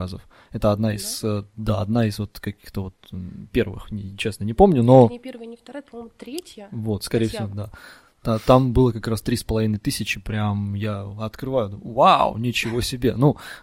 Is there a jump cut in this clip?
no; 0 cuts

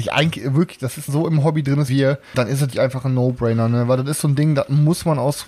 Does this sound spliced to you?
yes; 4 cuts; at 1.1 s, 1.9 s, 2.3 s, 2.7 s

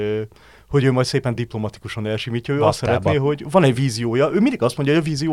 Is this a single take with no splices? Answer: yes; 0 cuts

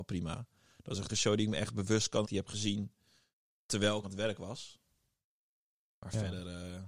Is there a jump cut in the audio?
yes; 3 cuts; at 1.1 s, 2.2 s, 4.0 s

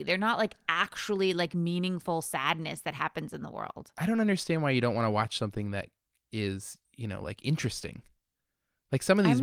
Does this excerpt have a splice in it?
no; 0 cuts

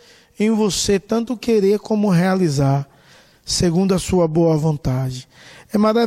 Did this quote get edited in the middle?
no; 0 cuts

